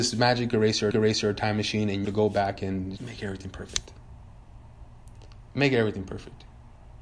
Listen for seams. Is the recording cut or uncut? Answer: cut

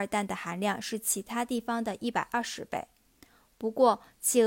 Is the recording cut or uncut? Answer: uncut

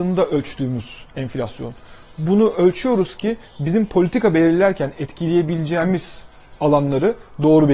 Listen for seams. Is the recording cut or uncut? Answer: uncut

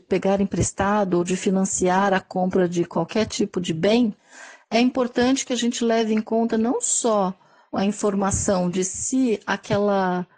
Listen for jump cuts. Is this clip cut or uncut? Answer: uncut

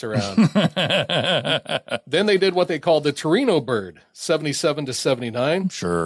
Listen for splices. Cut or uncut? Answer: uncut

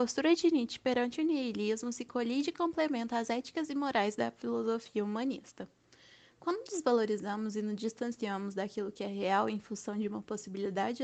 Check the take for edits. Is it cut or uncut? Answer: uncut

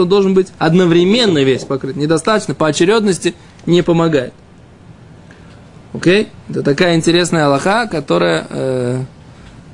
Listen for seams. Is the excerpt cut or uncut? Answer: uncut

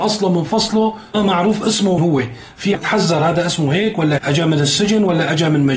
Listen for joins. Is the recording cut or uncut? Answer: cut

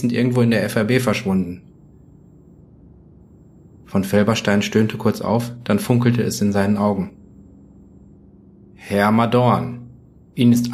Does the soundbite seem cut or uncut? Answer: uncut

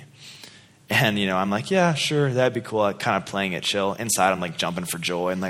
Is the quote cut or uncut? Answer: uncut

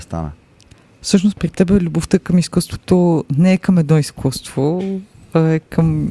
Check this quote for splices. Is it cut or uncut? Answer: uncut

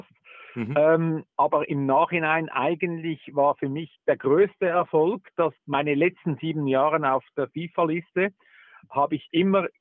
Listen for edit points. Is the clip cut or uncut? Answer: cut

